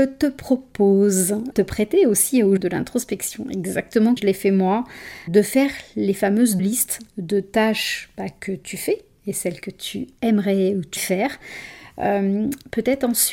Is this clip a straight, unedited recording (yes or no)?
no